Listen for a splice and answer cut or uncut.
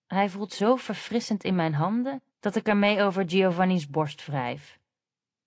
cut